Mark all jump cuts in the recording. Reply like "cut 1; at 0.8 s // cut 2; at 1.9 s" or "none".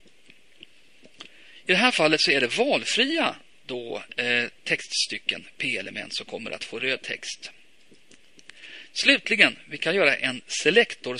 none